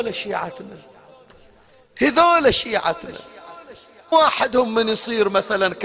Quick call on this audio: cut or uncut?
cut